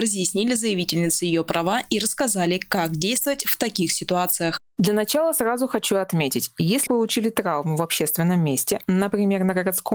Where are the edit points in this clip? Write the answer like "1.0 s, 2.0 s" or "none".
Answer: 4.7 s, 6.9 s